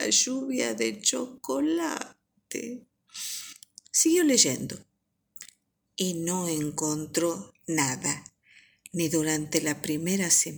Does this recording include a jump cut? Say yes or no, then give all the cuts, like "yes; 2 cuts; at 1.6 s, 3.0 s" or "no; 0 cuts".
no; 0 cuts